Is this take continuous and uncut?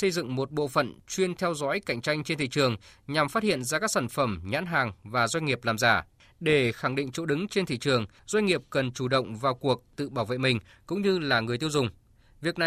yes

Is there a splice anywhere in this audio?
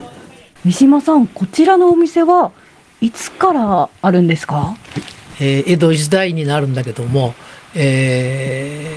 no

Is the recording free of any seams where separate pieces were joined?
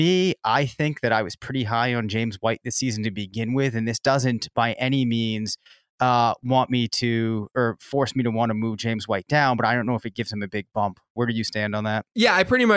yes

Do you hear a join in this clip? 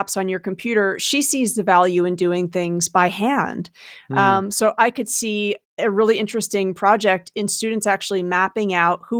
no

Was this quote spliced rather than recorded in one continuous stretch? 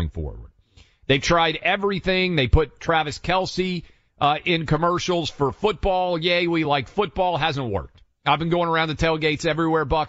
no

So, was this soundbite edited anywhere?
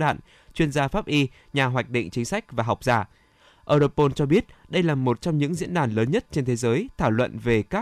no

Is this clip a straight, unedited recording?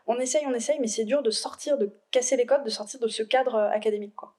yes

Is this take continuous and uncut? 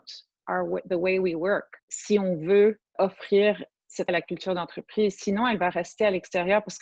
no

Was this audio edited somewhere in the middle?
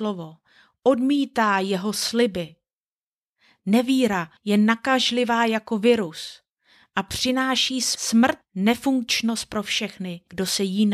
yes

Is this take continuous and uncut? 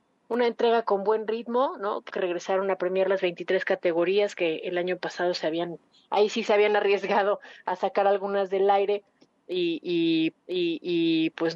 no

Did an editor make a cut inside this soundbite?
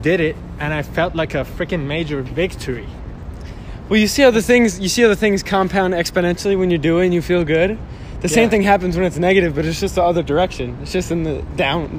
no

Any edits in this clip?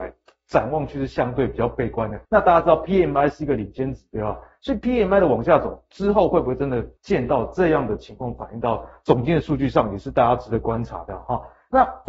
yes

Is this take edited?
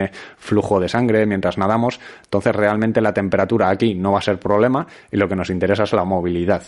no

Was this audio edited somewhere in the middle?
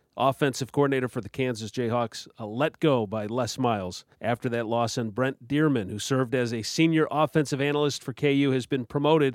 yes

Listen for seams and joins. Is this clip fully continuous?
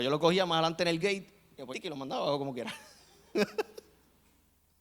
no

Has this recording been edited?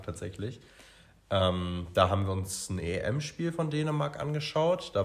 no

